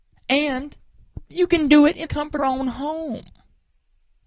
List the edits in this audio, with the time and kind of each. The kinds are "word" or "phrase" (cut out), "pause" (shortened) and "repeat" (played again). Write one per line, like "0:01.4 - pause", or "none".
0:02.1 - word
0:02.4 - phrase